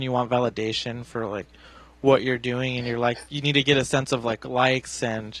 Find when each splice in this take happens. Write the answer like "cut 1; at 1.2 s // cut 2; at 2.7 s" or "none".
none